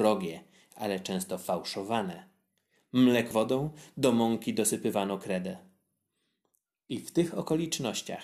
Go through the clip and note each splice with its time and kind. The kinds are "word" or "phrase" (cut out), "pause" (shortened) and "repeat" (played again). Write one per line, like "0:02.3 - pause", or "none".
0:03.3 - word